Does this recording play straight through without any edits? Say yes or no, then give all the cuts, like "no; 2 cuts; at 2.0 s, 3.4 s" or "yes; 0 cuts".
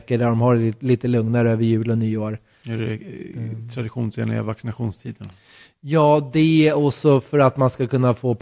yes; 0 cuts